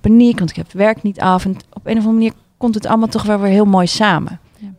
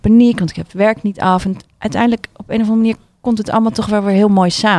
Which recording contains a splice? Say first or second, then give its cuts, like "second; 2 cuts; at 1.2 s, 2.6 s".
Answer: first; 1 cut; at 1.7 s